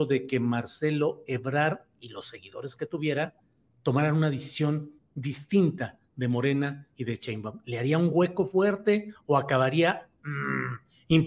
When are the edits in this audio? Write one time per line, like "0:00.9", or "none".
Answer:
none

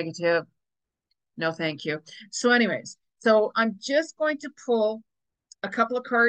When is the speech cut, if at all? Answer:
0:03.5

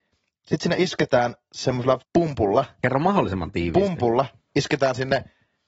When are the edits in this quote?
0:02.0

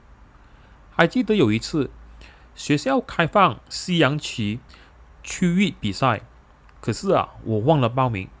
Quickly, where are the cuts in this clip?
none

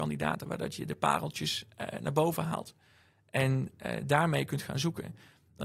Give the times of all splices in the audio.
none

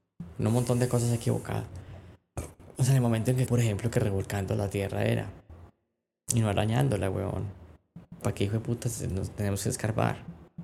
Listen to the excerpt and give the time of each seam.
0:03.5
0:08.2

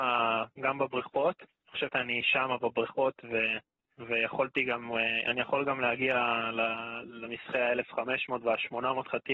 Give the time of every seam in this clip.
0:01.9

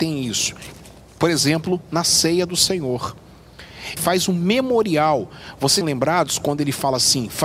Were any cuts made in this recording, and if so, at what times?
0:04.0
0:05.8

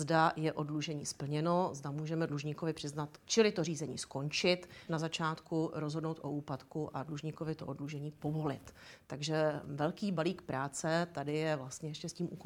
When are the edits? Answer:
0:03.2
0:04.9

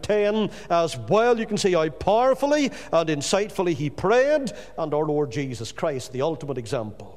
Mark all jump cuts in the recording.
none

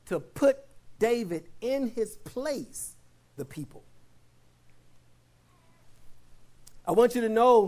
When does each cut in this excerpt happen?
0:01.0
0:03.4

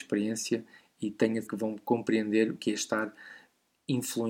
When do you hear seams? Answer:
0:01.5
0:02.6

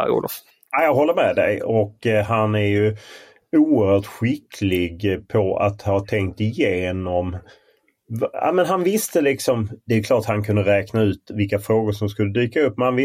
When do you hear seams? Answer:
none

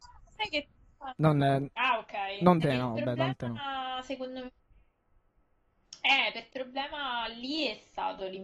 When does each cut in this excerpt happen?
0:02.6
0:06.5

